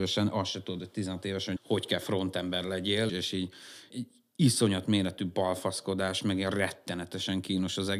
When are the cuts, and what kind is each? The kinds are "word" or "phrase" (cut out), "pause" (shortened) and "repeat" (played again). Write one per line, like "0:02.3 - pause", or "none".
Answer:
0:01.6 - word
0:03.1 - word
0:03.9 - word

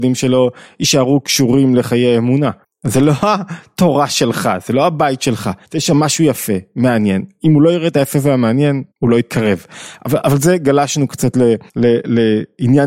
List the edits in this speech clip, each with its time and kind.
0:02.6 - pause
0:05.6 - pause
0:08.9 - pause
0:11.7 - pause

